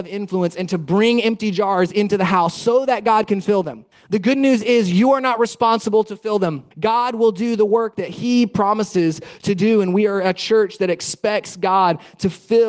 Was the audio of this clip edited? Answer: yes; 2 cuts; at 3.9 s, 6.7 s

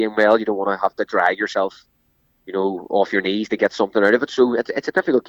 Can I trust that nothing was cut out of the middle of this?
yes; 0 cuts

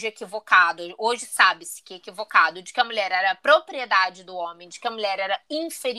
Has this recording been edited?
no; 0 cuts

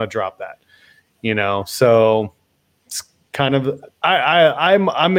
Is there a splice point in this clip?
yes; 1 cut; at 2.8 s

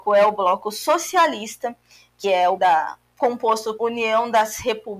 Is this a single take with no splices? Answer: no; 3 cuts; at 2.2 s, 2.6 s, 3.8 s

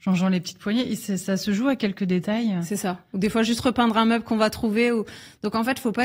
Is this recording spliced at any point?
no; 0 cuts

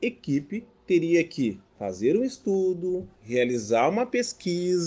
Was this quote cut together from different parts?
yes; 2 cuts; at 1.7 s, 3.1 s

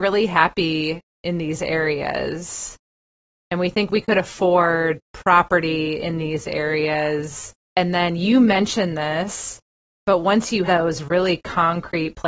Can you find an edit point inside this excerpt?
yes; 2 cuts; at 7.6 s, 10.7 s

